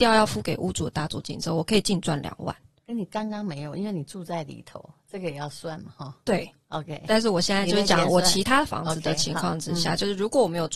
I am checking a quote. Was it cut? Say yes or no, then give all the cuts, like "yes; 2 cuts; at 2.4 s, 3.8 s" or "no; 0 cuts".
no; 0 cuts